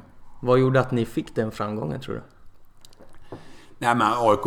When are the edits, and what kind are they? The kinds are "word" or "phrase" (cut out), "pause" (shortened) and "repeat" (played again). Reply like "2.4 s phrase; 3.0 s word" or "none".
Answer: none